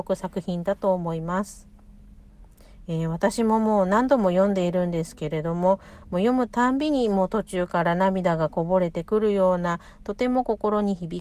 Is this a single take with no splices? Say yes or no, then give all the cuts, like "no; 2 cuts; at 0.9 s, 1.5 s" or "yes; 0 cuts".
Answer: yes; 0 cuts